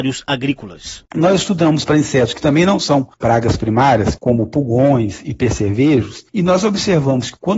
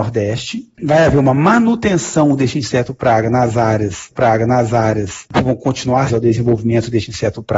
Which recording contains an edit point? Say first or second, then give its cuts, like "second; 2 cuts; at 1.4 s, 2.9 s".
second; 2 cuts; at 4.1 s, 6.1 s